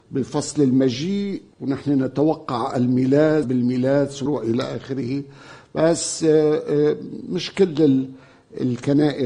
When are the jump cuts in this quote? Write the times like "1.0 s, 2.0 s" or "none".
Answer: 1.5 s, 3.4 s, 4.3 s